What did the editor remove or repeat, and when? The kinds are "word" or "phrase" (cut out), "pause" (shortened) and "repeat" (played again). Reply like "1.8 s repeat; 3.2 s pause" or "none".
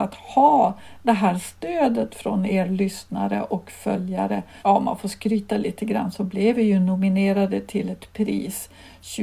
none